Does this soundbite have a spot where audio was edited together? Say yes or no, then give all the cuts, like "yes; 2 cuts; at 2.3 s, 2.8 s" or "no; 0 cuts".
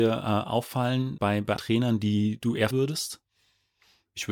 yes; 3 cuts; at 1.2 s, 1.6 s, 2.7 s